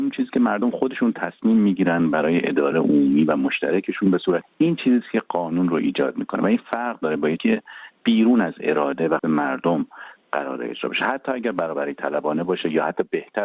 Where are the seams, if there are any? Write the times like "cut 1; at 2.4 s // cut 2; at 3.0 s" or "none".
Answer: cut 1; at 2.7 s // cut 2; at 4.4 s // cut 3; at 7.4 s // cut 4; at 9.2 s